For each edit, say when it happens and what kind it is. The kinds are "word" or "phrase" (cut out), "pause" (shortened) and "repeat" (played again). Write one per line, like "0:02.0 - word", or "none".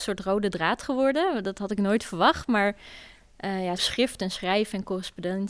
0:03.8 - word